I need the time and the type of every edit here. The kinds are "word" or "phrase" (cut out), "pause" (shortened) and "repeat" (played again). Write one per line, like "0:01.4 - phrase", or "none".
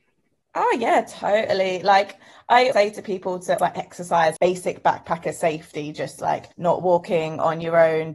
0:02.7 - word
0:03.6 - word
0:04.4 - word
0:06.5 - pause